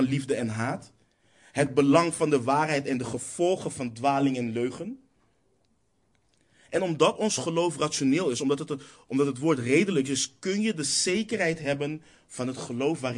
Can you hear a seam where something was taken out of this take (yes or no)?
no